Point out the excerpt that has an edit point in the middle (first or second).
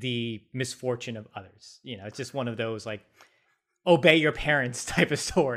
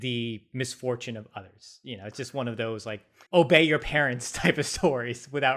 second